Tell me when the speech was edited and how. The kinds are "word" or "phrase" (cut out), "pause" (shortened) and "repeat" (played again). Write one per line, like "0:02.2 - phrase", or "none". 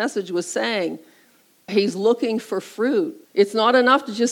0:01.7 - word
0:03.2 - pause